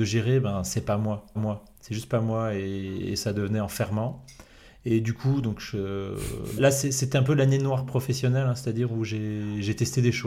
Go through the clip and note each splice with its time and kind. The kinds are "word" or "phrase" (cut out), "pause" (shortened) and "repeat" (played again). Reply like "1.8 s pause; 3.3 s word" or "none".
1.3 s repeat; 6.6 s word

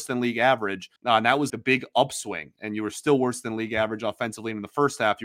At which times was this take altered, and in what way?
1.0 s pause; 1.5 s word

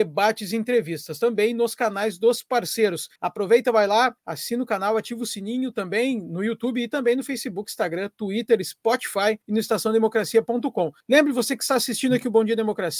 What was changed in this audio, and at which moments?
3.2 s pause; 4.2 s pause; 9.4 s pause; 11.0 s pause

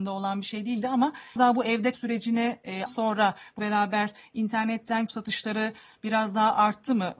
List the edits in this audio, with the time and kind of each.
1.4 s word; 1.9 s word; 2.9 s word; 3.6 s word; 5.1 s word

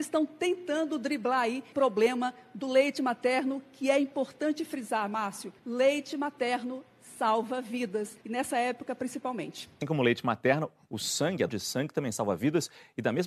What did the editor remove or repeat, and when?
1.7 s word; 5.6 s pause; 8.2 s pause; 11.5 s word

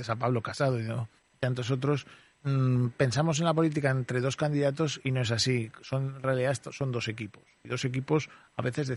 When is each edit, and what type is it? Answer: 1.2 s pause; 2.3 s pause

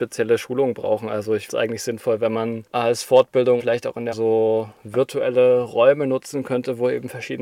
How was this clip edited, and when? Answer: 1.5 s word; 3.6 s word; 4.1 s word

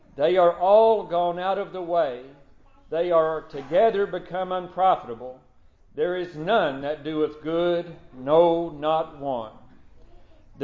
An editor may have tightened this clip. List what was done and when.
none

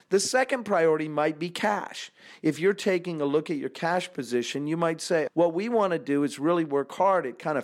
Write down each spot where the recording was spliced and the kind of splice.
5.3 s word

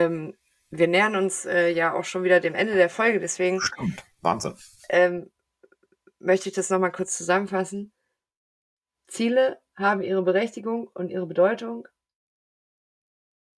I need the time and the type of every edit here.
none

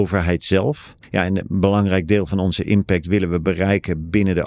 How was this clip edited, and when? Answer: none

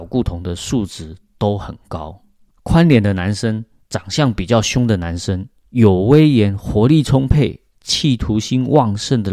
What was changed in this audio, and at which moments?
none

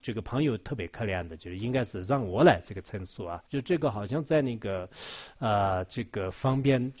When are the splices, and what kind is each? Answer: 3.5 s pause

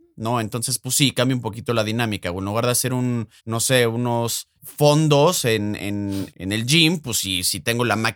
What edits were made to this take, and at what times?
3.4 s pause; 4.6 s pause; 5.8 s word; 6.3 s word

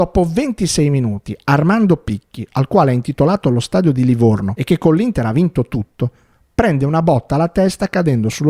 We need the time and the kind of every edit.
none

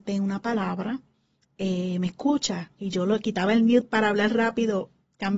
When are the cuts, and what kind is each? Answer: none

